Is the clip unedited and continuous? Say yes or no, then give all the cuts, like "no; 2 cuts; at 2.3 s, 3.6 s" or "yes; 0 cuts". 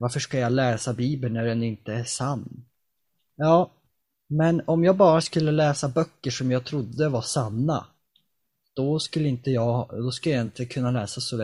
yes; 0 cuts